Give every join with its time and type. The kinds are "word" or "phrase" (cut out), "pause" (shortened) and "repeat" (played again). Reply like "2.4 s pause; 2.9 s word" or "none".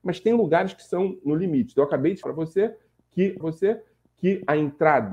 2.2 s word; 3.4 s repeat

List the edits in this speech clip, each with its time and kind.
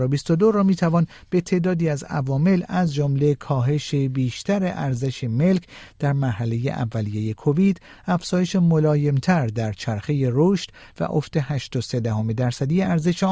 none

